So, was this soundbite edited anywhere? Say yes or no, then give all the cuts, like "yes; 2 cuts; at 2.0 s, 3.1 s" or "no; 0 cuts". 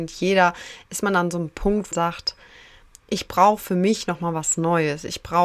yes; 1 cut; at 1.9 s